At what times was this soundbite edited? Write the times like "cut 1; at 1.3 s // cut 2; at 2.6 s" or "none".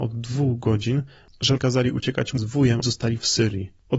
cut 1; at 1.6 s // cut 2; at 2.4 s // cut 3; at 2.8 s